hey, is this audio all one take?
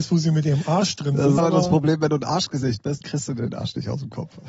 no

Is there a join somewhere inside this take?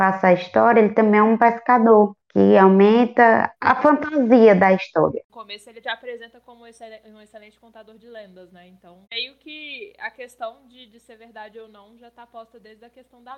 yes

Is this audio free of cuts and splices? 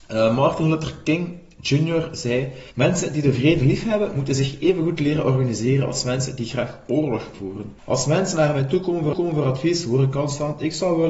no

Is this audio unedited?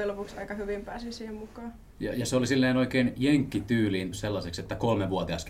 no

